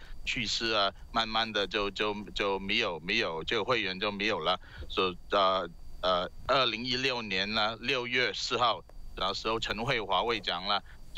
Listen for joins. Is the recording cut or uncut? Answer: cut